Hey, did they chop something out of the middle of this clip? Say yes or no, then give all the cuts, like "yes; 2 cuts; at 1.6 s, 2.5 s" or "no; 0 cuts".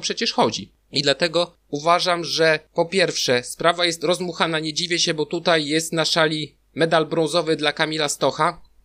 no; 0 cuts